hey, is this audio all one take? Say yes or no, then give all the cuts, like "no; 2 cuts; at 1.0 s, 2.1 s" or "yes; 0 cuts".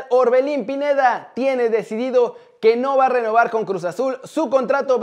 yes; 0 cuts